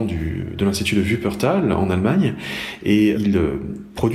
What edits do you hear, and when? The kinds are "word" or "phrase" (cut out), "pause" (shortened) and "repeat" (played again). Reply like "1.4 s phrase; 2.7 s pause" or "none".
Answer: 3.1 s word